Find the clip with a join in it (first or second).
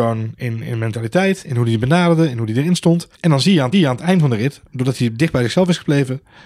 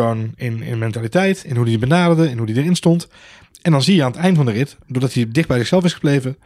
first